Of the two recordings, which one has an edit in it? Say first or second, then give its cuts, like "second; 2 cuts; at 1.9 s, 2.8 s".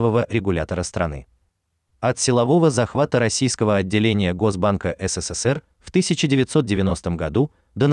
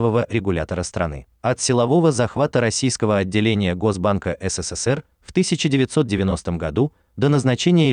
second; 1 cut; at 1.3 s